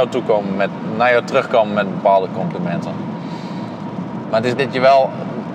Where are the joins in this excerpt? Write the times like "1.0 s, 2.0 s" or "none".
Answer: 4.6 s

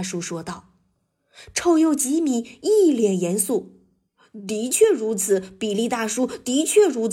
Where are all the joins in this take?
none

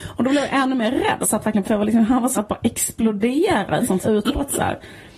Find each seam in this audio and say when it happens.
1.2 s, 1.6 s, 2.4 s, 4.0 s

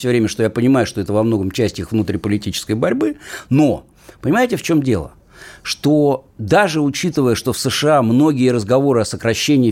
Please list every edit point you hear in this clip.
none

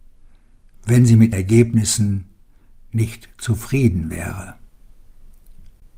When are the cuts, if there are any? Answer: 1.3 s

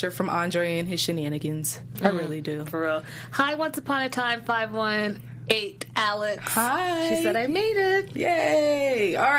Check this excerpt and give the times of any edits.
none

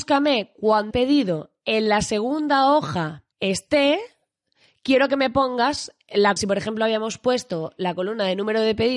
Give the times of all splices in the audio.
0.9 s, 3.3 s, 6.4 s

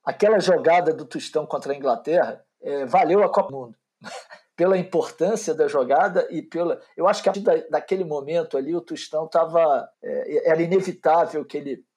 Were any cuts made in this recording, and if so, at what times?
2.5 s, 3.5 s, 7.3 s, 9.9 s

